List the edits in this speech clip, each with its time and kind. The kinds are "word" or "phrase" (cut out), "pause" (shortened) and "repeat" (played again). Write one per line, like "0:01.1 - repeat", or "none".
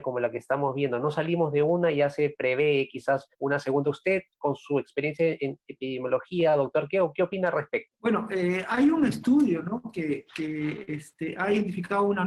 0:03.3 - pause
0:07.9 - pause